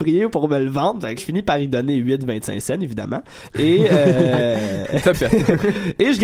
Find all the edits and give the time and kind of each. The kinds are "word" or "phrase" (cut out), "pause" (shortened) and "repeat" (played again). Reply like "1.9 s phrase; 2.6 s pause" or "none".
1.2 s word; 5.1 s word